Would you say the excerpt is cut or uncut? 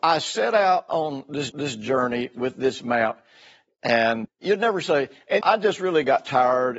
cut